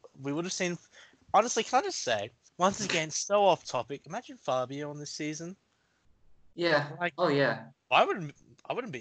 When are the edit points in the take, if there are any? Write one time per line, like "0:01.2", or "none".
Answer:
0:02.5
0:07.2